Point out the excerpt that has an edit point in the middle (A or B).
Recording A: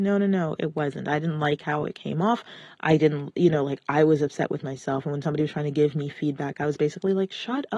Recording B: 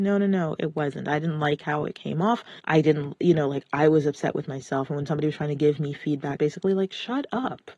B